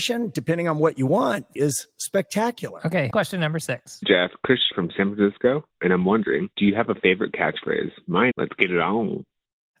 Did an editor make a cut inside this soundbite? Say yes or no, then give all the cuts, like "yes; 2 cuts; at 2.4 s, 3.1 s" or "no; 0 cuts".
yes; 6 cuts; at 1.6 s, 3.1 s, 4.0 s, 4.7 s, 6.5 s, 8.3 s